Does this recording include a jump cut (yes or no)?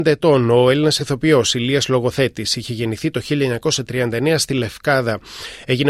no